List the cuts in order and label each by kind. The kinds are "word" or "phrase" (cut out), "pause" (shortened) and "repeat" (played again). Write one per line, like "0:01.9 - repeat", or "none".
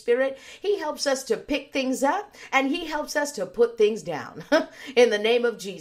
none